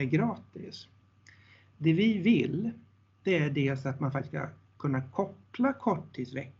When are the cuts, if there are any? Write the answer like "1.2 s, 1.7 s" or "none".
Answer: none